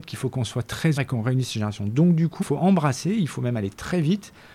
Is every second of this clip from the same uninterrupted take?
no; 2 cuts; at 1.0 s, 2.4 s

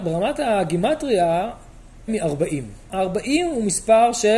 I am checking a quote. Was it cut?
yes; 2 cuts; at 2.1 s, 2.9 s

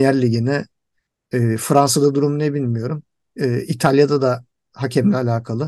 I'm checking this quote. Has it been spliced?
no; 0 cuts

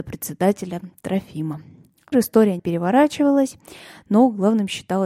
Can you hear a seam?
yes; 2 cuts; at 2.1 s, 2.6 s

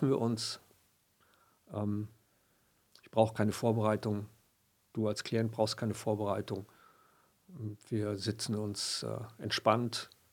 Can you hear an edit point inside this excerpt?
no; 0 cuts

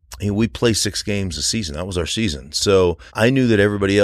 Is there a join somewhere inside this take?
yes; 1 cut; at 3.1 s

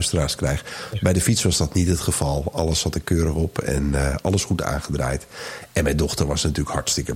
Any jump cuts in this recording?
no; 0 cuts

